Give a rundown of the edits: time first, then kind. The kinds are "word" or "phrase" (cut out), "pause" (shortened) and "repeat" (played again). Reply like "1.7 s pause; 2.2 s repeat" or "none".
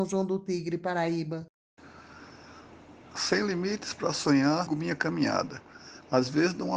4.7 s word